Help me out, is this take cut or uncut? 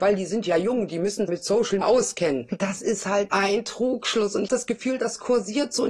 cut